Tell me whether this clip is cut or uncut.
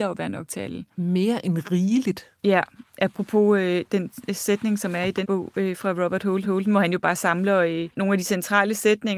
cut